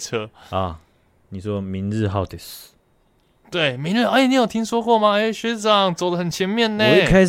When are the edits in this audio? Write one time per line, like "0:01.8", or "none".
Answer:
none